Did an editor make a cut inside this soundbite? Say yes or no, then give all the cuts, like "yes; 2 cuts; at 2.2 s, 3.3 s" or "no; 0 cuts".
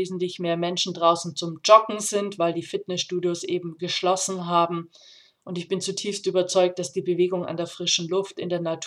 no; 0 cuts